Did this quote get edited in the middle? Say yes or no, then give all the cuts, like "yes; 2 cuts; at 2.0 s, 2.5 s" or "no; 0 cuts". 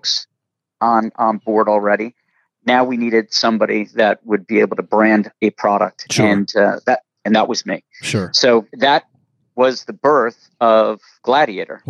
yes; 1 cut; at 8.7 s